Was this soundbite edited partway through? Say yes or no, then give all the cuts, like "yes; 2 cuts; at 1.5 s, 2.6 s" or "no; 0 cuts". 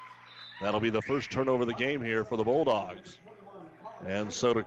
no; 0 cuts